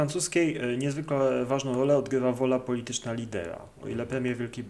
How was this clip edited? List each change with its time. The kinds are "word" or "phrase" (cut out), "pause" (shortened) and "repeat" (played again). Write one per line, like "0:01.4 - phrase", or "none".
none